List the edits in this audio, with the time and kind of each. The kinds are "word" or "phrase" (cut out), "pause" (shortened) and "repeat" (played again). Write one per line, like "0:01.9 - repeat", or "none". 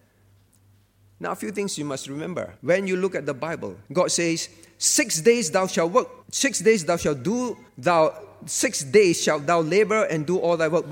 0:02.6 - pause
0:03.8 - pause
0:06.2 - pause
0:07.7 - pause